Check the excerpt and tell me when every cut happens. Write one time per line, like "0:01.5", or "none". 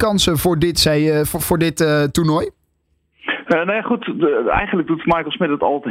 none